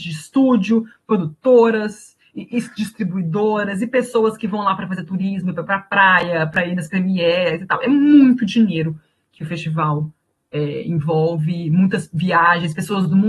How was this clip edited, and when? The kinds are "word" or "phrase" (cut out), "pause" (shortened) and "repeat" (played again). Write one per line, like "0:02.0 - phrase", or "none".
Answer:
none